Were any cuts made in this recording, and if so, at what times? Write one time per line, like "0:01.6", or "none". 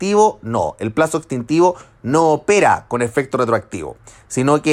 none

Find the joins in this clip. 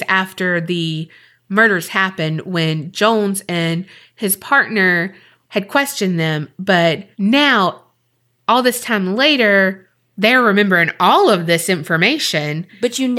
0:07.1

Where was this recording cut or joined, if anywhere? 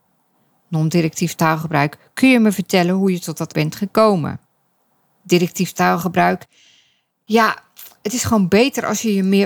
0:03.5

